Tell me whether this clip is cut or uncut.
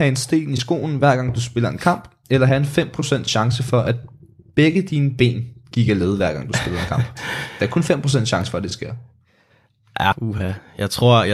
cut